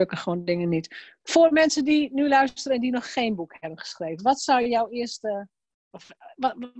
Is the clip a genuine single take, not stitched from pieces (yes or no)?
yes